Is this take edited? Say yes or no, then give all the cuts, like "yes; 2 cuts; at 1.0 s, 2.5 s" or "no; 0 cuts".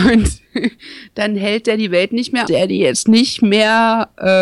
yes; 1 cut; at 2.5 s